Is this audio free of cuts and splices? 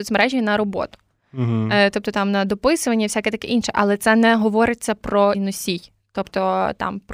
no; 1 cut; at 5.3 s

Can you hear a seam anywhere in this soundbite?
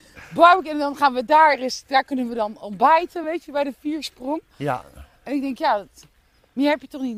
no; 0 cuts

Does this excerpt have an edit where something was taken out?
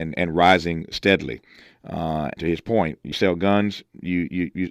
yes; 2 cuts; at 2.4 s, 3.1 s

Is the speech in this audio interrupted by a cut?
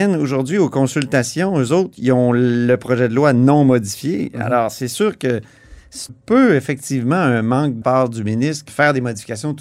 yes; 3 cuts; at 6.1 s, 7.8 s, 8.7 s

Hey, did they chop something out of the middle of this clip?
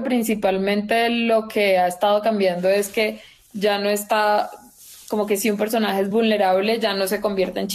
no; 0 cuts

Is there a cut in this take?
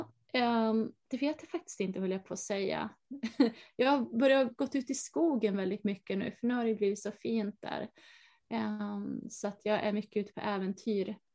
yes; 1 cut; at 1.0 s

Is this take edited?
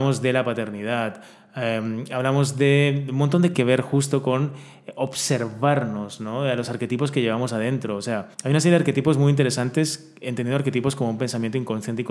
yes; 2 cuts; at 3.5 s, 8.3 s

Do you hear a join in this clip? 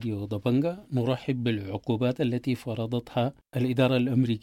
no; 0 cuts

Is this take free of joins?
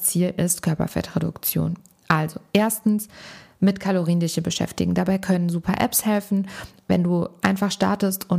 yes; 0 cuts

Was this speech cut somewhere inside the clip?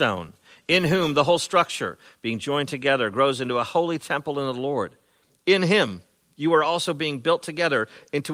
no; 0 cuts

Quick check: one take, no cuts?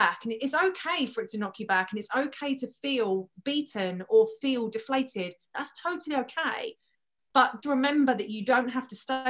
no; 1 cut; at 7.6 s

